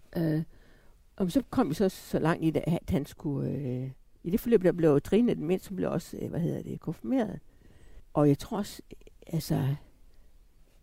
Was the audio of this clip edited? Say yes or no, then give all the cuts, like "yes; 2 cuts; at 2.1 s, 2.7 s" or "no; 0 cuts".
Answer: no; 0 cuts